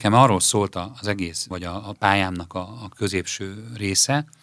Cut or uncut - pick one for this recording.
cut